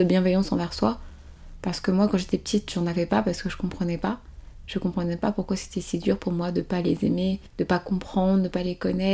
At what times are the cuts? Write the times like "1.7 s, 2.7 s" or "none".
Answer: 7.5 s